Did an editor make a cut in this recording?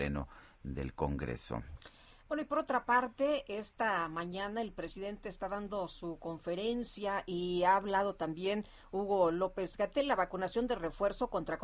no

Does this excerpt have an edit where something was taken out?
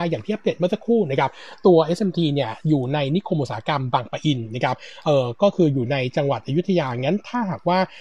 no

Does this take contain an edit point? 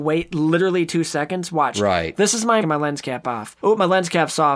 yes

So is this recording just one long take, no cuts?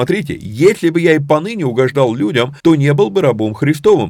no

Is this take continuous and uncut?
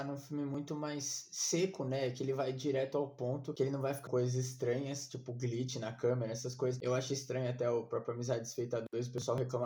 no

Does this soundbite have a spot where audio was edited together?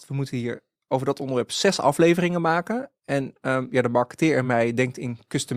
no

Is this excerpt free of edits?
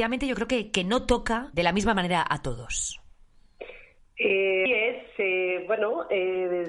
no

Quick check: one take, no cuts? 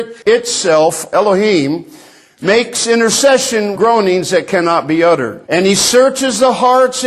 no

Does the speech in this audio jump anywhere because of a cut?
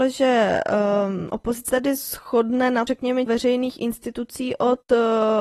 yes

